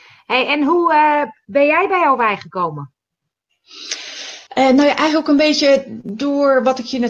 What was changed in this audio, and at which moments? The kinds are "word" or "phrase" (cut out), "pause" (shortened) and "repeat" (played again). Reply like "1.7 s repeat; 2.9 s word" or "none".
4.5 s pause